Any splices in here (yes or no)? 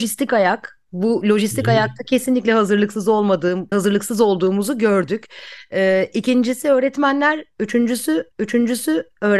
yes